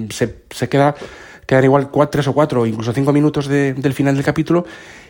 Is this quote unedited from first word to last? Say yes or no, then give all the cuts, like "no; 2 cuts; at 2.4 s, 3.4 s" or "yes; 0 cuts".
yes; 0 cuts